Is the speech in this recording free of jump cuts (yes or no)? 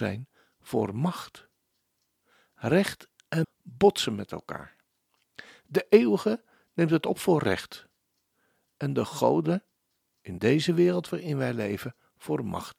no